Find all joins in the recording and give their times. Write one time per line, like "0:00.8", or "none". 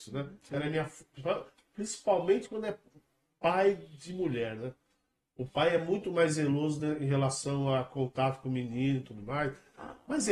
none